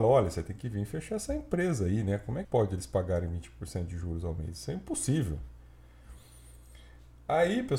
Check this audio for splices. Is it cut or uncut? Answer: cut